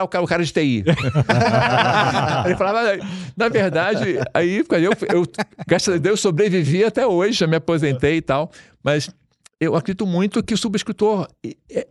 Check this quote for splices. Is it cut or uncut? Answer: uncut